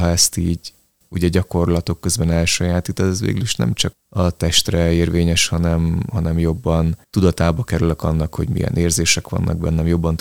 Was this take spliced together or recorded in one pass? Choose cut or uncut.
cut